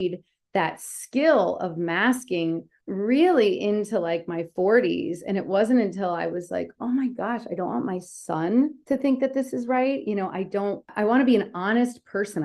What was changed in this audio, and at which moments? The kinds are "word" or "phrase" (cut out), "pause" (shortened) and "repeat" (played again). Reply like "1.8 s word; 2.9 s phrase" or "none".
none